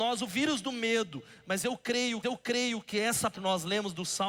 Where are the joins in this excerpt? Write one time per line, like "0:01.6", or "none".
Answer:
0:02.2
0:03.3